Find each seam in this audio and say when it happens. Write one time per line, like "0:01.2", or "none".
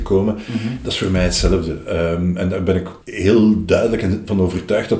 0:03.0